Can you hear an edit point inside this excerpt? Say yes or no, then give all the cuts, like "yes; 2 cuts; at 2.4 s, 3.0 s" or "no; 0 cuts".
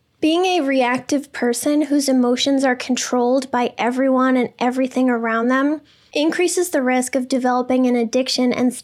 no; 0 cuts